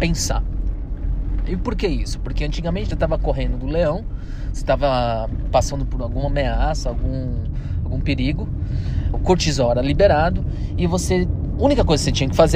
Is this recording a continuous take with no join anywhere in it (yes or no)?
no